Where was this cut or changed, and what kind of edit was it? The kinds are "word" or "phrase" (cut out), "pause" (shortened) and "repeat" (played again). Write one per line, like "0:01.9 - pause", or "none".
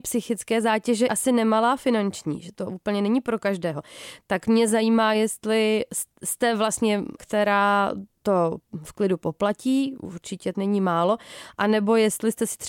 0:01.1 - word
0:07.2 - word
0:10.5 - word